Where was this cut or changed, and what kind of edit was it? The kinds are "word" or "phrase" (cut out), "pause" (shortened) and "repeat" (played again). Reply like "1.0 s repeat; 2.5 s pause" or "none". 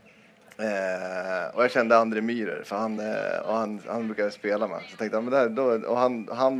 none